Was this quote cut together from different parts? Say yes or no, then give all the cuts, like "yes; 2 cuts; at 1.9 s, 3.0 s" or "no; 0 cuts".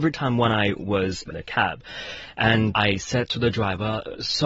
yes; 2 cuts; at 1.3 s, 2.7 s